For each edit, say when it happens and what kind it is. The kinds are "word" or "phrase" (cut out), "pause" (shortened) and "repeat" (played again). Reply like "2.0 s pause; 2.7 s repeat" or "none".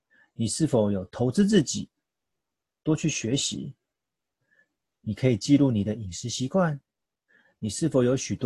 none